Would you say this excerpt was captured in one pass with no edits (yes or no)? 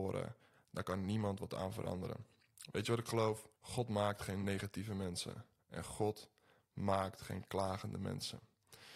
no